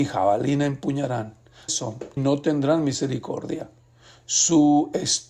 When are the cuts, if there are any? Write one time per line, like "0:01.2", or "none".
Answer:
0:01.7
0:02.2